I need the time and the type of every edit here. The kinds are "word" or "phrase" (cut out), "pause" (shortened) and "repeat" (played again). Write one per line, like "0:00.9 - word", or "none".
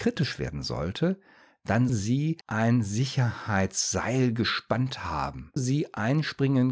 0:01.9 - word
0:02.4 - pause
0:05.6 - word